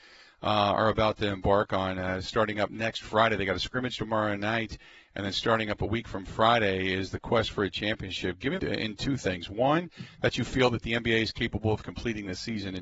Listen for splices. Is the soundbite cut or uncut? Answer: cut